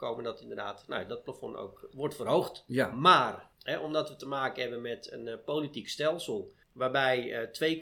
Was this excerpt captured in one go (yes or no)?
no